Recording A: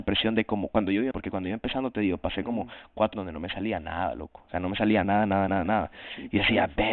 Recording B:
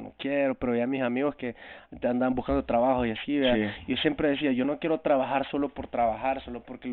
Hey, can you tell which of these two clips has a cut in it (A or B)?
A